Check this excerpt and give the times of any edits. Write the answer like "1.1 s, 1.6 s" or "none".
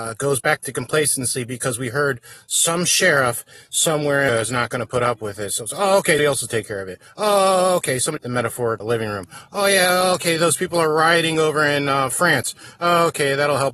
4.3 s, 6.2 s, 8.2 s, 8.8 s